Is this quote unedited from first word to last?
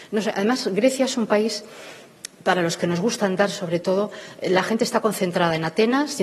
no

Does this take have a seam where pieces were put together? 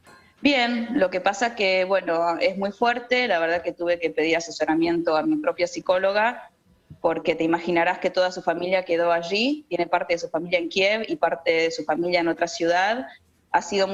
no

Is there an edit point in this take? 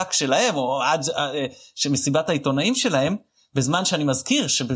no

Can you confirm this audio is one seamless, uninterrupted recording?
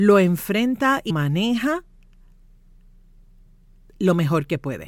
no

